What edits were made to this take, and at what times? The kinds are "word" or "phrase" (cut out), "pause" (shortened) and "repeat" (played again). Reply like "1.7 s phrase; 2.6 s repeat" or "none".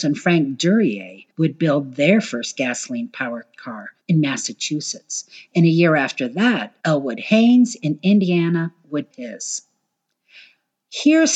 1.3 s pause; 4.0 s pause; 6.8 s pause; 9.1 s word